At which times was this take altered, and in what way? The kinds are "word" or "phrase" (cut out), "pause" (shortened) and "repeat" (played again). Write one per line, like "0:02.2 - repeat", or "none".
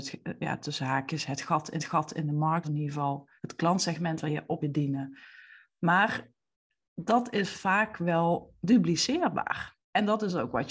0:01.8 - repeat
0:02.6 - word
0:03.4 - pause
0:04.3 - word
0:04.6 - word
0:09.8 - pause